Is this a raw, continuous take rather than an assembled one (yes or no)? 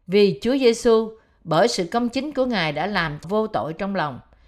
no